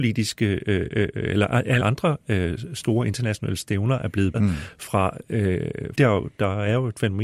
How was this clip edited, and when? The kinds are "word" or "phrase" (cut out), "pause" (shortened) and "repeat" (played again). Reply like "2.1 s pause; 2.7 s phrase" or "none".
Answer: 1.8 s word; 4.3 s word; 5.9 s word